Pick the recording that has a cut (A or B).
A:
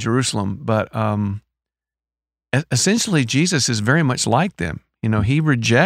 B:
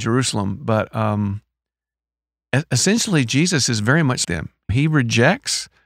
B